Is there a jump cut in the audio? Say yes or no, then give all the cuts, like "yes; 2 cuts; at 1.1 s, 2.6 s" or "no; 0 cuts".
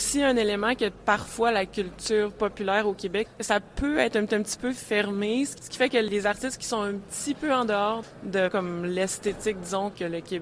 yes; 2 cuts; at 4.3 s, 8.5 s